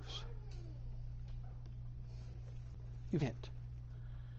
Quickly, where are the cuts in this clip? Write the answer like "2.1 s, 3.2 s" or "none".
3.2 s